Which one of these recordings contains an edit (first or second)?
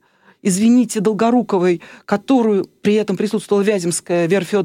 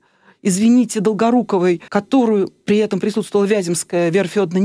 second